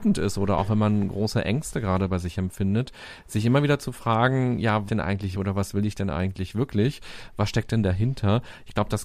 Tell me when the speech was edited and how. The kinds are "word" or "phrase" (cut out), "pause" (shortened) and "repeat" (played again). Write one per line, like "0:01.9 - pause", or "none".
0:04.9 - phrase
0:05.3 - word